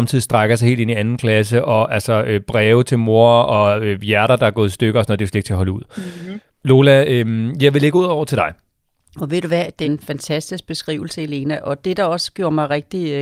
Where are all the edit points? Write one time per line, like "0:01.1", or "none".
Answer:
0:09.8